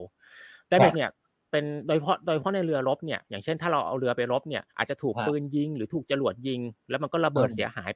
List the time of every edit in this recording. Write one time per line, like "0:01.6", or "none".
0:00.9
0:04.7

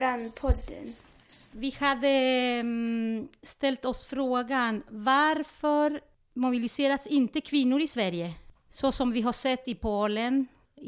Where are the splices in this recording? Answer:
none

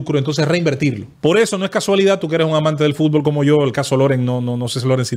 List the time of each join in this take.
0:01.1

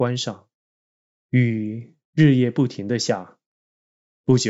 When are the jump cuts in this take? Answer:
0:01.0

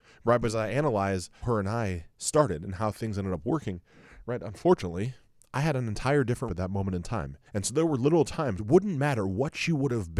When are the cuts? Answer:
0:01.4
0:02.1
0:05.2
0:06.5
0:07.5
0:08.6

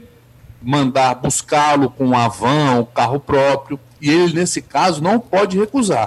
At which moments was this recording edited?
none

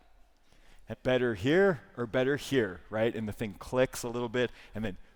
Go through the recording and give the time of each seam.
0:00.9

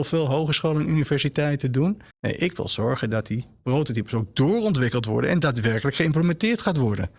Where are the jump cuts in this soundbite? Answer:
0:02.1

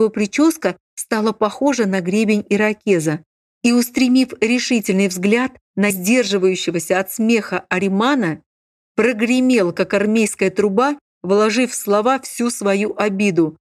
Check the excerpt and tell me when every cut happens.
0:05.9

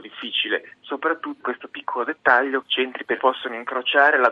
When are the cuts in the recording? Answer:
0:01.4
0:02.6
0:03.2

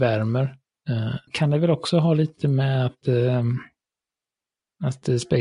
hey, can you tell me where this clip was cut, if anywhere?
0:01.3
0:03.0

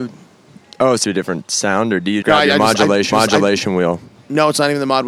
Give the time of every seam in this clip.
0:01.0
0:02.2
0:03.1

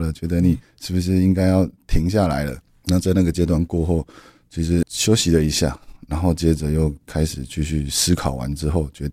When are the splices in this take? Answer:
0:04.8

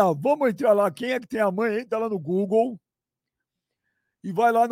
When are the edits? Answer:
none

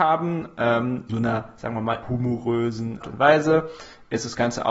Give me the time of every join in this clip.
0:01.1
0:02.0
0:03.0

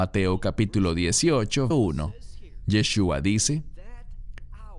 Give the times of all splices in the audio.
0:01.7

